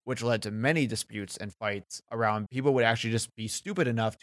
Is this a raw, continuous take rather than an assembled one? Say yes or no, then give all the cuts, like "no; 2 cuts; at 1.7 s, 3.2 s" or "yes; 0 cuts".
no; 1 cut; at 2.5 s